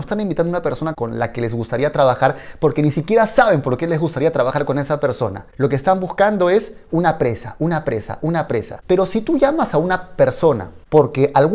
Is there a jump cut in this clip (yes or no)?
no